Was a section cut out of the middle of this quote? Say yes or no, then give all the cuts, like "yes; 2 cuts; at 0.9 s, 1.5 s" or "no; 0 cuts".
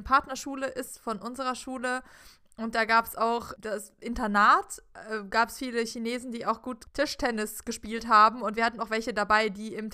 no; 0 cuts